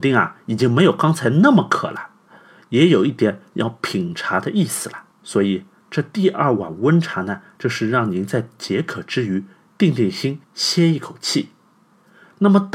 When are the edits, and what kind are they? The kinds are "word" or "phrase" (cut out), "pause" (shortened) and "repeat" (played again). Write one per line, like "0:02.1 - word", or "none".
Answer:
0:05.1 - pause
0:10.4 - pause